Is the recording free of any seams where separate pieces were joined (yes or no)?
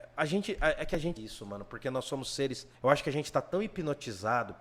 no